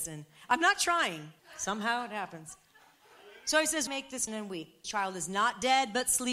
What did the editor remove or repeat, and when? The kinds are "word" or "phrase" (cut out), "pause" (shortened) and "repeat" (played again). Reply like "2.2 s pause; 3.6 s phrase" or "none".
1.4 s word; 3.9 s word; 4.3 s word; 4.8 s word